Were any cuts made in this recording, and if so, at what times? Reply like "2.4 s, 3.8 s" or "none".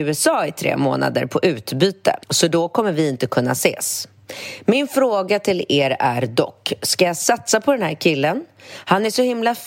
2.2 s